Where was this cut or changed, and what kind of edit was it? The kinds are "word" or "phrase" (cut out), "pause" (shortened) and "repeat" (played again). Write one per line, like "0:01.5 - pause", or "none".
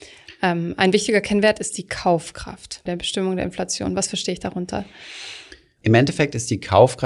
0:02.9 - word